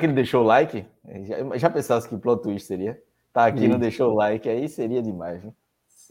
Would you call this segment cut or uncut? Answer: uncut